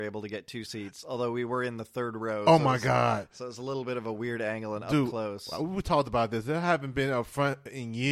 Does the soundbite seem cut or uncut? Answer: uncut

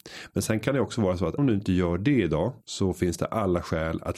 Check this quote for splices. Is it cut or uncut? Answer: cut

